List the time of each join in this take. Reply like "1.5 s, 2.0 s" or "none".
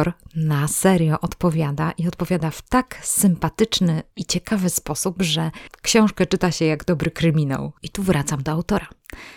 none